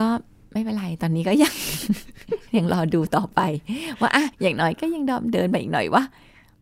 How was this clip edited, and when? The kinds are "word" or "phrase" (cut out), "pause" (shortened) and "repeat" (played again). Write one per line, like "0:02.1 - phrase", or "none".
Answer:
0:04.3 - pause